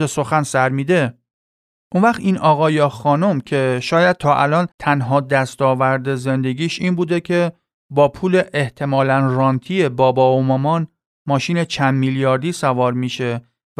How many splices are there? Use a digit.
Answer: 1